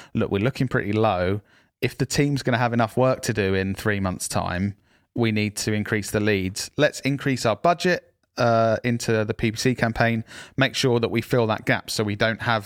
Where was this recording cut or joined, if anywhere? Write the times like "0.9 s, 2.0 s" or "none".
none

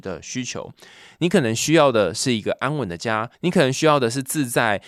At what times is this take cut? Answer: 3.3 s

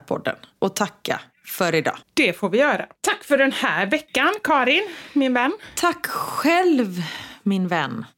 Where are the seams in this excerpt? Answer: 2.0 s

